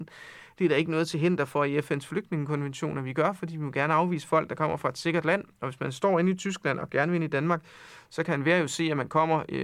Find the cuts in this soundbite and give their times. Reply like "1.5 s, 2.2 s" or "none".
none